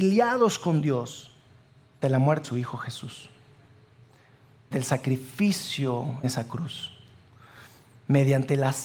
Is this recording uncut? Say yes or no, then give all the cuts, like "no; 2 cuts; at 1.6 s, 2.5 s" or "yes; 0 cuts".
no; 4 cuts; at 2.0 s, 2.4 s, 4.7 s, 6.2 s